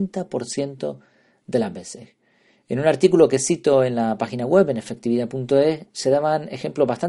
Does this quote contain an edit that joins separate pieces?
no; 0 cuts

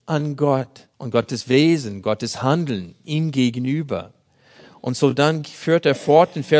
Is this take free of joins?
no; 1 cut; at 0.9 s

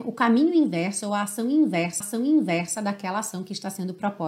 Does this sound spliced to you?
yes; 1 cut; at 2.0 s

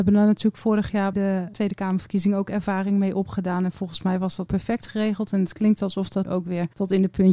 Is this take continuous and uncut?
no; 3 cuts; at 1.1 s, 4.5 s, 6.2 s

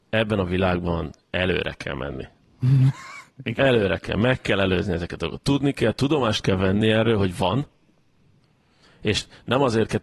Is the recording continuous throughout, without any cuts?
yes; 0 cuts

